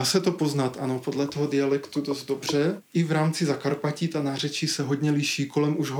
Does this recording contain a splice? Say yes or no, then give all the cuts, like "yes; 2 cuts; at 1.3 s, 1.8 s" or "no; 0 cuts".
no; 0 cuts